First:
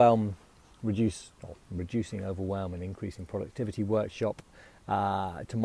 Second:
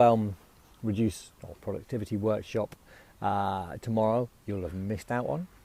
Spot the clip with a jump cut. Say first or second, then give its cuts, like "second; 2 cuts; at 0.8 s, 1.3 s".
second; 1 cut; at 1.6 s